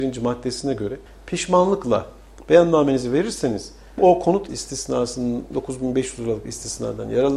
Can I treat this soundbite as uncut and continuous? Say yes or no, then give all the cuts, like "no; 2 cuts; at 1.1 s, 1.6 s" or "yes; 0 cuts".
no; 3 cuts; at 1.1 s, 4.0 s, 4.5 s